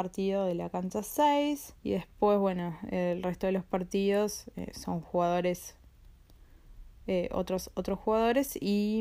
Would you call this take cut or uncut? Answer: cut